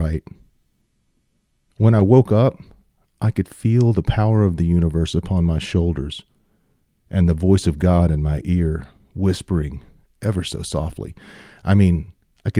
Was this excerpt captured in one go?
yes; 0 cuts

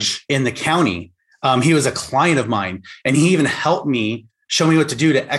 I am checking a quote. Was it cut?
no; 0 cuts

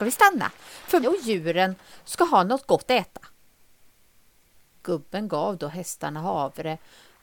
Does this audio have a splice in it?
yes; 2 cuts; at 1.0 s, 2.9 s

